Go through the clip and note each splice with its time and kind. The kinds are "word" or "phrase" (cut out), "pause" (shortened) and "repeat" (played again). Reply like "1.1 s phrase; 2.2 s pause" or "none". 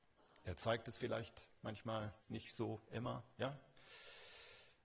2.2 s pause